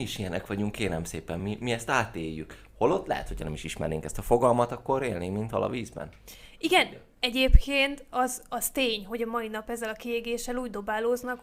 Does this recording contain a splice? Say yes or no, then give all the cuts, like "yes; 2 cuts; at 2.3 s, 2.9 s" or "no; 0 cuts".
no; 0 cuts